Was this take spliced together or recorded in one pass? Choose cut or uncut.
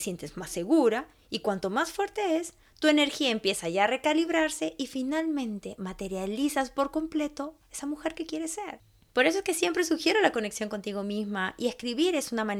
uncut